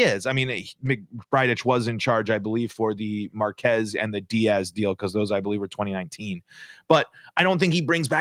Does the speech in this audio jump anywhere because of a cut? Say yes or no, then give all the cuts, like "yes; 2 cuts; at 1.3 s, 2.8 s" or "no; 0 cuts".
no; 0 cuts